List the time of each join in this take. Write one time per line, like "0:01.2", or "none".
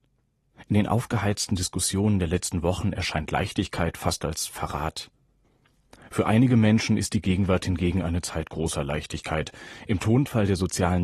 none